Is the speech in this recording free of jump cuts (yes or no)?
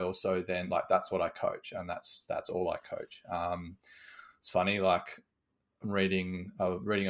yes